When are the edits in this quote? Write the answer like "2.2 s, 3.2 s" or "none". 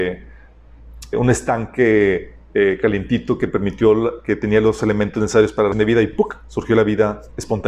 1.1 s, 5.7 s